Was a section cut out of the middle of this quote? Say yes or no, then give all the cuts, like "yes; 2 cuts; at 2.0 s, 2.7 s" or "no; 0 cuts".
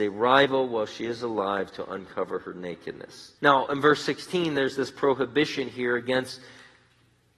yes; 1 cut; at 3.4 s